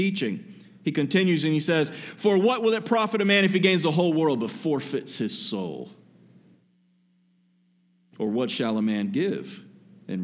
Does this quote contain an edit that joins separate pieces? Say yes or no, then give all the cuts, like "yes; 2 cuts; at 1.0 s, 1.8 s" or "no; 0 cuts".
no; 0 cuts